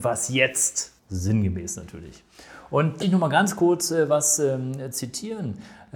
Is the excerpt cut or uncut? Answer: cut